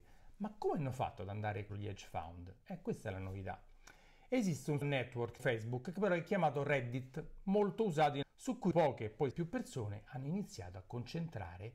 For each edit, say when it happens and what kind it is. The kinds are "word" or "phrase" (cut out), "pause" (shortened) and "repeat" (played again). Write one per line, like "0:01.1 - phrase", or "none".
0:01.7 - word
0:04.8 - word
0:05.4 - word
0:08.2 - word
0:08.7 - word
0:09.3 - word